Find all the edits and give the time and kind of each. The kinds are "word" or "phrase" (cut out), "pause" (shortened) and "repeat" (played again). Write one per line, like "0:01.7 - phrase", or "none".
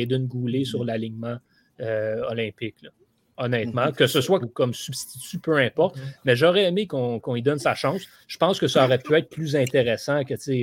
0:04.4 - phrase